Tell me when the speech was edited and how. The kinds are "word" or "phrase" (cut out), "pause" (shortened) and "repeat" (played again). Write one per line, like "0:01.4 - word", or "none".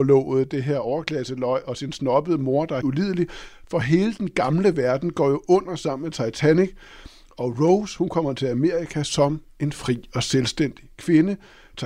0:02.8 - word